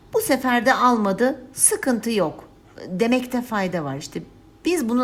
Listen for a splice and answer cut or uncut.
uncut